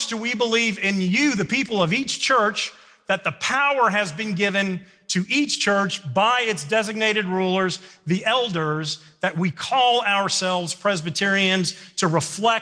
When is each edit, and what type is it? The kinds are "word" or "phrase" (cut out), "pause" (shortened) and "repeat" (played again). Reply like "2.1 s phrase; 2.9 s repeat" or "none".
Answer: none

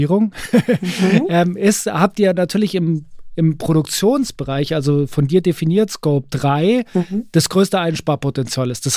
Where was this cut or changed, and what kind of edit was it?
none

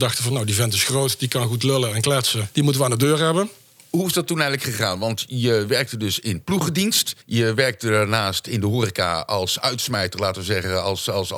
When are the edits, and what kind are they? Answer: 7.2 s pause

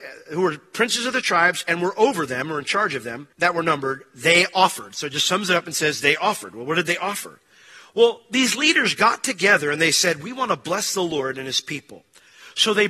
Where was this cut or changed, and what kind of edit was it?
3.3 s pause

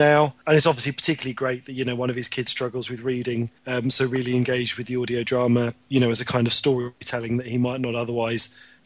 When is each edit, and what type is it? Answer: 3.6 s pause

